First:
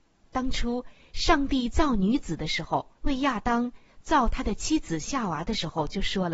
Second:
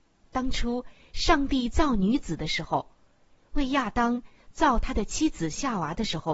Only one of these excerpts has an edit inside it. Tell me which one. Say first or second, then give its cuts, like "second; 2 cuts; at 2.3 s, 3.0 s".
first; 1 cut; at 3.0 s